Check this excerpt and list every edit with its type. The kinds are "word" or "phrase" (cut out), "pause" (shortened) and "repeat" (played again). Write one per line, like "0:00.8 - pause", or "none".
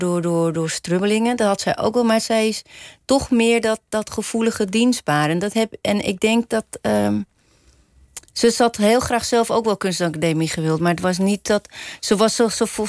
0:08.3 - pause